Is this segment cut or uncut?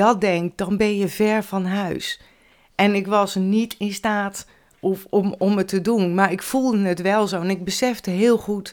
uncut